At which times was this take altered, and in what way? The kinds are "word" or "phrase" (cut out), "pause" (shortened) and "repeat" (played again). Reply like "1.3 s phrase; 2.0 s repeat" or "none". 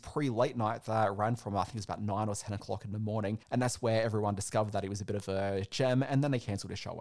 3.4 s pause